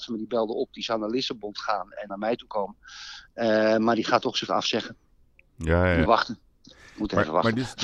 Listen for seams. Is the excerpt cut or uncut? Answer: cut